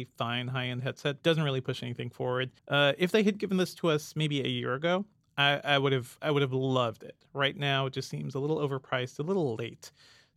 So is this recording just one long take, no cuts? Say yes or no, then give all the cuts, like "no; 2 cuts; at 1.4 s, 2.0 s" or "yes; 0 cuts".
no; 2 cuts; at 1.2 s, 2.6 s